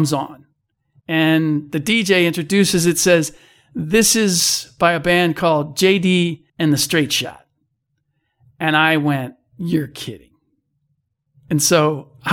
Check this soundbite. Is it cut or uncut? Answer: cut